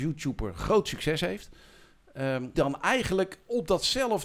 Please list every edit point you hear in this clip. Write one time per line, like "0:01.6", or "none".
0:02.5